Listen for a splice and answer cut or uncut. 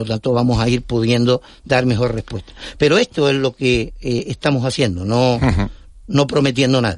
uncut